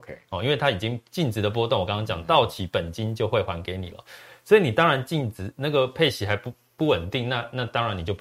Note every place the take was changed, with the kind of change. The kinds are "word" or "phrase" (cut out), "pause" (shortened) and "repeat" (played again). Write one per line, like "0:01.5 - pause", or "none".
none